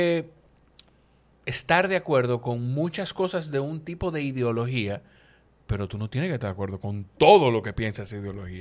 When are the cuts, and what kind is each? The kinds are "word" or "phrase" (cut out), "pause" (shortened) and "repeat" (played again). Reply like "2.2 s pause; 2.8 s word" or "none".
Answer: none

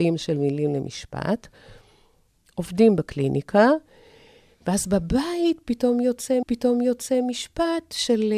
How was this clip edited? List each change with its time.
6.4 s repeat

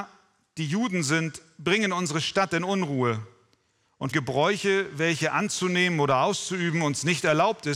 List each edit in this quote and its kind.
4.1 s word

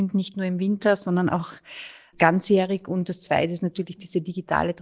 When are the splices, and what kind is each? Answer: none

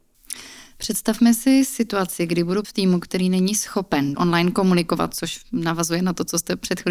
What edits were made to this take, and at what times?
2.6 s word; 4.1 s word

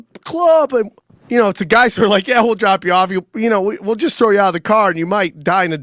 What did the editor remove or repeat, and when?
1.0 s pause

